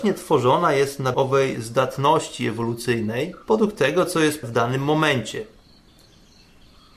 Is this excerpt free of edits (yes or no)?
no